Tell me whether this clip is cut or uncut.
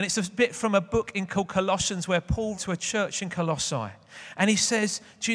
cut